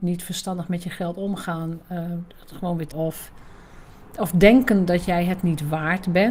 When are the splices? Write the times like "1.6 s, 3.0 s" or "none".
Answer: 2.9 s